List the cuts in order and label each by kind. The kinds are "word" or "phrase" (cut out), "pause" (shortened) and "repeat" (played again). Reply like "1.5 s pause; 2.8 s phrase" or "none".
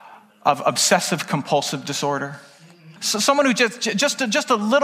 3.0 s pause